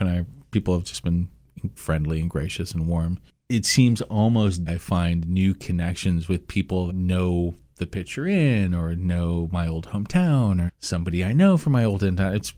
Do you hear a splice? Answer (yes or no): yes